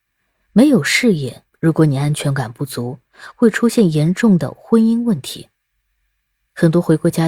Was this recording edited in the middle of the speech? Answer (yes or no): yes